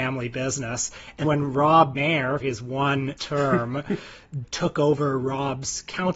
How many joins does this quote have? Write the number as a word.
four